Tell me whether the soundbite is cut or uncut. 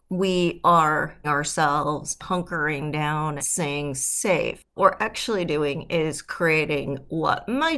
cut